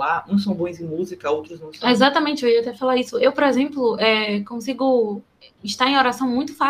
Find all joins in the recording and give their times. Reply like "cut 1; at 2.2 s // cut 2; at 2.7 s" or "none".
none